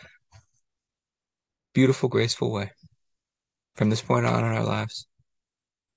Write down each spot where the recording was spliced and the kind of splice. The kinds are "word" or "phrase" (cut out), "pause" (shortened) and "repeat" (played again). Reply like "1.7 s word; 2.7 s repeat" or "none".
none